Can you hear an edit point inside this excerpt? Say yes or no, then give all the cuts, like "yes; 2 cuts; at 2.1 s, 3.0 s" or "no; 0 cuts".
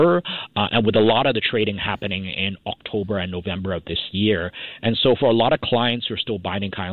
no; 0 cuts